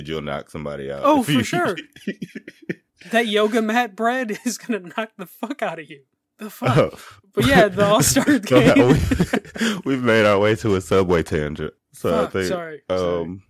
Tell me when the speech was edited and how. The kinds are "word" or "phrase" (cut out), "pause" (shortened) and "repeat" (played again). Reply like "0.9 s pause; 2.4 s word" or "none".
2.9 s pause; 6.2 s pause; 7.2 s pause; 11.8 s pause